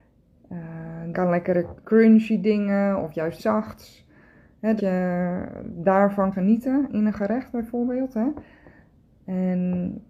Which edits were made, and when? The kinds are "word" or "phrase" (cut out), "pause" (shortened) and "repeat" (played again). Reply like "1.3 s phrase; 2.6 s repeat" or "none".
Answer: 1.1 s word; 1.8 s word; 3.4 s word; 4.8 s word; 6.3 s word; 6.9 s word

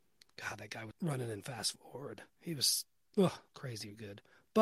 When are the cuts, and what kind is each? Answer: 0.9 s word; 2.3 s pause; 3.5 s pause

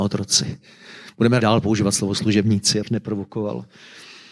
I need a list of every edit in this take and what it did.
1.4 s word; 2.8 s word

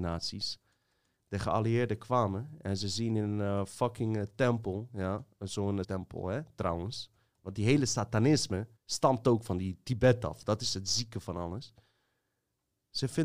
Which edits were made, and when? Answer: 5.8 s word; 8.8 s pause

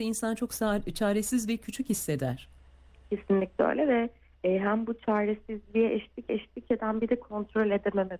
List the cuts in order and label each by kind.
6.3 s repeat

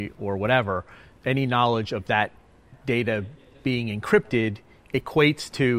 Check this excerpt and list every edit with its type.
none

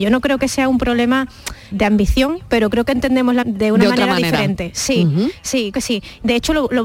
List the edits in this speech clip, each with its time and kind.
1.7 s word; 3.4 s word; 5.7 s word

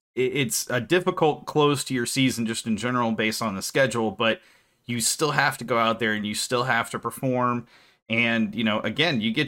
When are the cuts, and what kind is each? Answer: none

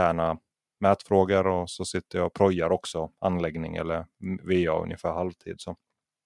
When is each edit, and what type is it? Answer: none

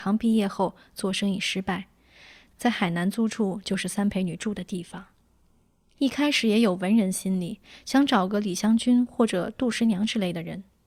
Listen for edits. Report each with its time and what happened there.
none

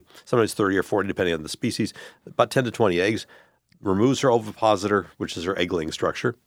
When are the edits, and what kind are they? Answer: none

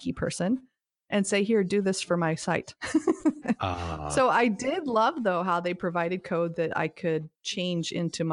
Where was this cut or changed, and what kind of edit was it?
none

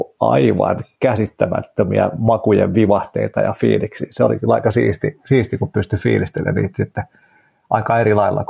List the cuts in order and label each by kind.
none

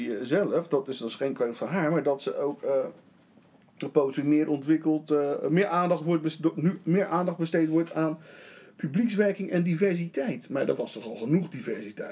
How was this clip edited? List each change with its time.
none

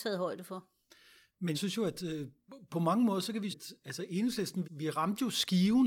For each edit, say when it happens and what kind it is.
1.5 s word; 3.5 s word; 4.6 s word

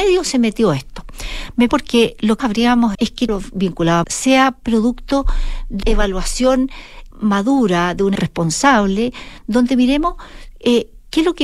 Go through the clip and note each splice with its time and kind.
1.7 s word; 2.4 s word; 2.9 s word; 3.3 s word; 4.0 s word; 5.8 s word; 7.1 s word; 8.2 s word

